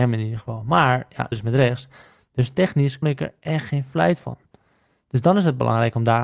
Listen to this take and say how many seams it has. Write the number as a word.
two